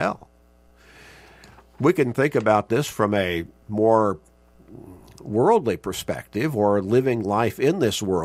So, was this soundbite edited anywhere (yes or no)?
no